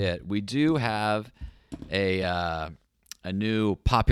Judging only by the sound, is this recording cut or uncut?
uncut